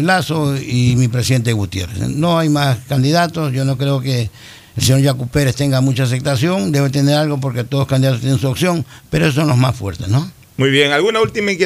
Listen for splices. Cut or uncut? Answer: uncut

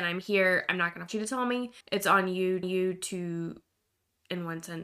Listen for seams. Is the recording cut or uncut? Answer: cut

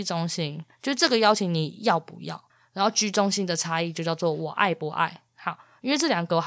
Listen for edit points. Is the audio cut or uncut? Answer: cut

